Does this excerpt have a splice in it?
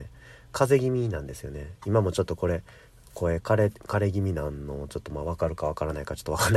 no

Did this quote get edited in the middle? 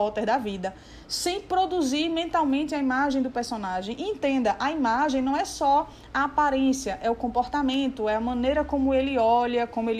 no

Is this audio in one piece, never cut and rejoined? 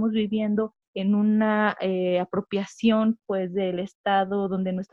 yes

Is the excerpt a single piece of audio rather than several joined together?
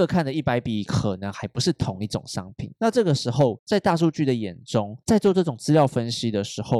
no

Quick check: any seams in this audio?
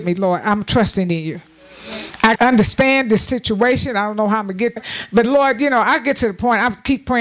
yes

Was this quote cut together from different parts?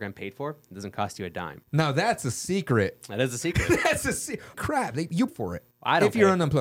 yes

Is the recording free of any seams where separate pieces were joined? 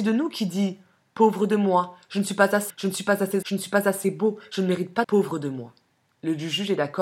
no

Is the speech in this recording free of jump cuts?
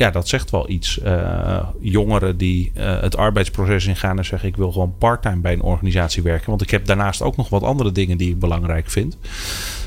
yes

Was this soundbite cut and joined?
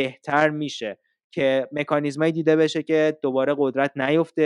no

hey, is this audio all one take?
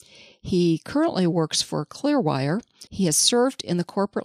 no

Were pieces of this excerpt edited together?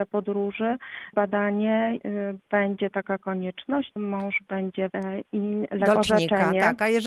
yes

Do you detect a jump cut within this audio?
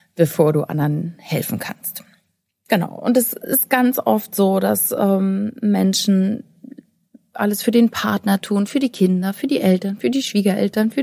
no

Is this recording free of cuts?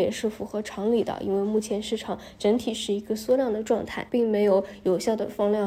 no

